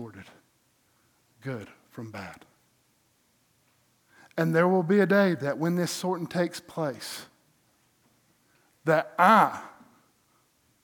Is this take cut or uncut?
uncut